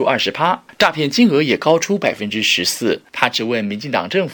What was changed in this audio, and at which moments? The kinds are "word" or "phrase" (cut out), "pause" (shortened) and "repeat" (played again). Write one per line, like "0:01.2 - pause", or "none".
0:03.1 - pause